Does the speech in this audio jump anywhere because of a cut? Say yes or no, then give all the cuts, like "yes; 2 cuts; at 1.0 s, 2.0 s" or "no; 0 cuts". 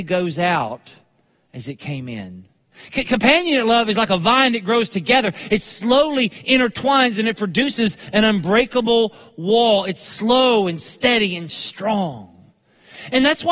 no; 0 cuts